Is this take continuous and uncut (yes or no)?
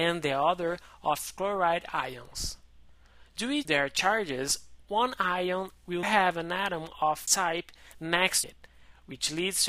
no